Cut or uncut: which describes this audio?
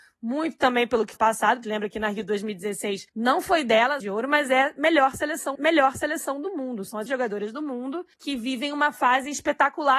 cut